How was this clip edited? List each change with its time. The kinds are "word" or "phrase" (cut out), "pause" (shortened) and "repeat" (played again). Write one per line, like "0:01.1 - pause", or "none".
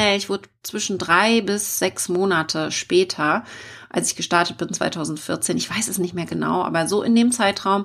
0:06.3 - word